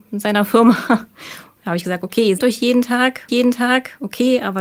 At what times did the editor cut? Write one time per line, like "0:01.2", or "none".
0:02.4
0:03.3